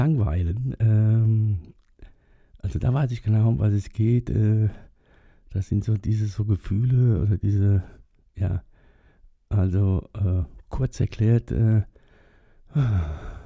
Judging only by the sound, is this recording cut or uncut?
uncut